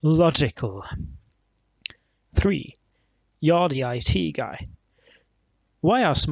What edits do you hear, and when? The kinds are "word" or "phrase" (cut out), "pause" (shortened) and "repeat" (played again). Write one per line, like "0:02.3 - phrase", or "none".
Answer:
none